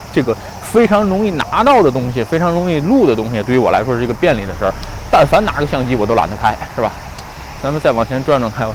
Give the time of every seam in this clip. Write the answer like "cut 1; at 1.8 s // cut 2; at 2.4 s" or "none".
cut 1; at 7.6 s